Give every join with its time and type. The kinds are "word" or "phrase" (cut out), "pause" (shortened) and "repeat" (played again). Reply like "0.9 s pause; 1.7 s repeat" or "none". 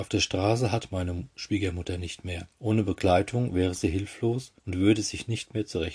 2.5 s pause; 4.6 s pause